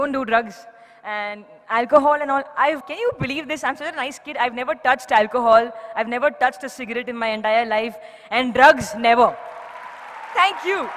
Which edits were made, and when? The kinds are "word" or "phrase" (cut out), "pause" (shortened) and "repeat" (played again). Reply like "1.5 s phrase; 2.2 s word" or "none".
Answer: 2.8 s word